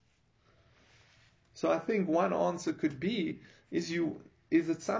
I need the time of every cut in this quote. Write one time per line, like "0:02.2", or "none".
none